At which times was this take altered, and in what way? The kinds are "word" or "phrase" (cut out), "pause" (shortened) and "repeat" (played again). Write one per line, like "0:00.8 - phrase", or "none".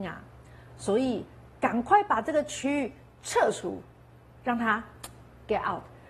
none